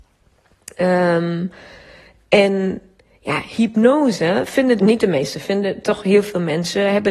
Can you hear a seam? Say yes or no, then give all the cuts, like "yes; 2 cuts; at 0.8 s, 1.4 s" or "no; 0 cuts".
yes; 1 cut; at 4.8 s